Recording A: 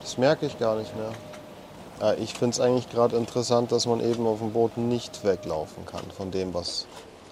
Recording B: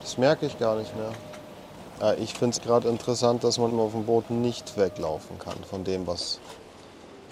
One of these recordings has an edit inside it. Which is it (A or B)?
B